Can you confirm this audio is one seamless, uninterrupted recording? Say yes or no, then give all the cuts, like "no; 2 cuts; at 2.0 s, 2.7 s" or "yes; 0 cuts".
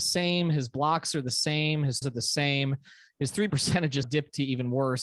no; 3 cuts; at 2.0 s, 3.5 s, 4.0 s